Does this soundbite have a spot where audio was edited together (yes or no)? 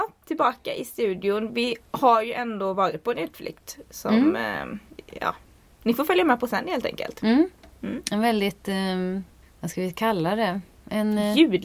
no